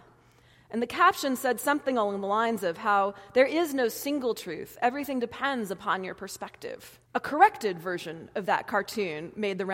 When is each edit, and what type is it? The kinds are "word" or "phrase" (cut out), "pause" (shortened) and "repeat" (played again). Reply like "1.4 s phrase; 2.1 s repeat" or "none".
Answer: 7.0 s pause